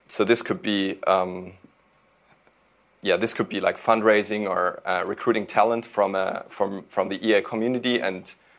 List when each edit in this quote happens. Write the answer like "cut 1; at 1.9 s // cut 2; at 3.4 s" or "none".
none